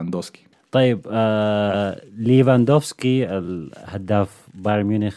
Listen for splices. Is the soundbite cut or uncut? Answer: uncut